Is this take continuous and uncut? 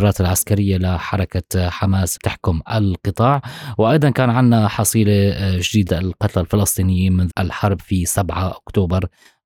no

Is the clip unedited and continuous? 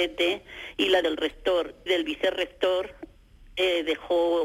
no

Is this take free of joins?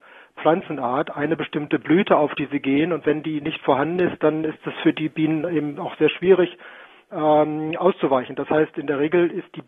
yes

